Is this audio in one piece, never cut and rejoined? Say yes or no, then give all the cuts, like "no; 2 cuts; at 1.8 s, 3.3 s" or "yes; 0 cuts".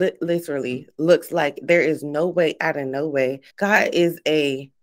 no; 1 cut; at 3.5 s